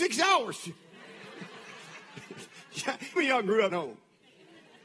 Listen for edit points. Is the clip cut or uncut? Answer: cut